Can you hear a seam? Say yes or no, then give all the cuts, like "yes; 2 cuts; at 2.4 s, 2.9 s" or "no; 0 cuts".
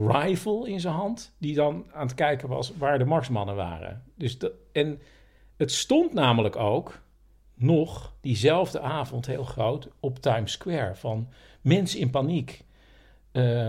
no; 0 cuts